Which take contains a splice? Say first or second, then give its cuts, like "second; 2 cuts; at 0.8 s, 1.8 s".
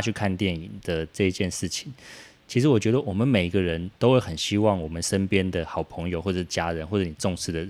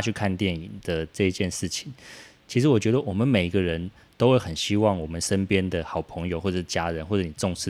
first; 1 cut; at 4.0 s